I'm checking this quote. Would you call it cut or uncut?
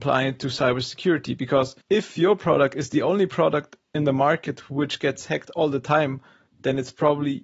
cut